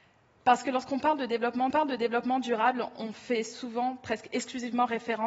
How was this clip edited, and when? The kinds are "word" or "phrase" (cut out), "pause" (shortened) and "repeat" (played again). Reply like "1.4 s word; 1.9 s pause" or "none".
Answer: 1.7 s repeat